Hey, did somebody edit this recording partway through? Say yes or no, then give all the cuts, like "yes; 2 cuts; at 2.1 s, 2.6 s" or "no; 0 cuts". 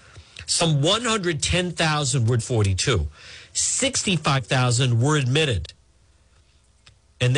yes; 1 cut; at 2.4 s